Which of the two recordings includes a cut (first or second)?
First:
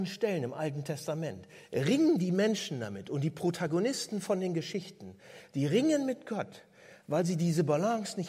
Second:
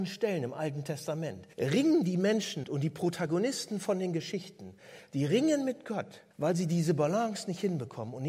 second